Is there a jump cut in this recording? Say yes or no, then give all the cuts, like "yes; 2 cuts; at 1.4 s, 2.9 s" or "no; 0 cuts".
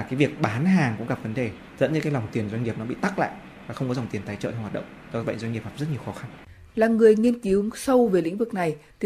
yes; 1 cut; at 1.7 s